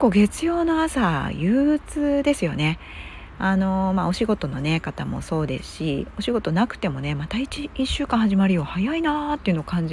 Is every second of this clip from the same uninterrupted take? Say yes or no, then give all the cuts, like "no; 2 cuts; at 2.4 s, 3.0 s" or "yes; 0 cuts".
yes; 0 cuts